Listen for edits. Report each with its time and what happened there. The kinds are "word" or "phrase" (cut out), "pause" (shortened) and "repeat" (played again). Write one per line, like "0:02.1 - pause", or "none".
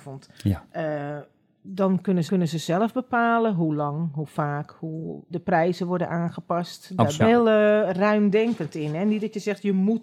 0:02.3 - repeat
0:05.3 - word
0:07.2 - phrase